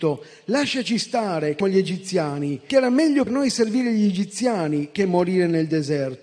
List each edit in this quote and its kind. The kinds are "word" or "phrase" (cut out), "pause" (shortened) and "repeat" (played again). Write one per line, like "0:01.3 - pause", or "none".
0:01.6 - word
0:02.7 - word
0:03.3 - word